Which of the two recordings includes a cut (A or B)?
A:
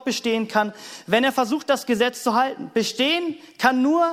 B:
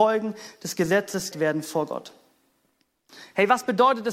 B